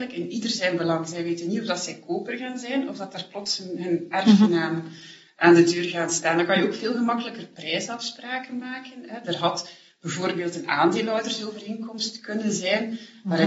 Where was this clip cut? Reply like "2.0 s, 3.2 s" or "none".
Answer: none